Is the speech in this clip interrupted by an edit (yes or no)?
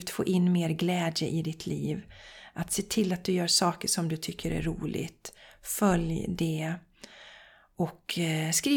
no